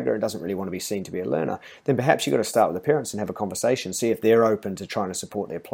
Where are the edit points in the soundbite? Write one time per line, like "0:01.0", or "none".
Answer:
none